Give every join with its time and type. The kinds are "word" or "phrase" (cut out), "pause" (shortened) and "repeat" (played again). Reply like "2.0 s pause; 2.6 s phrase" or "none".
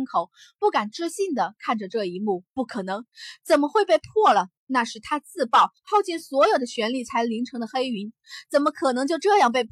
2.5 s pause; 4.6 s pause; 5.8 s pause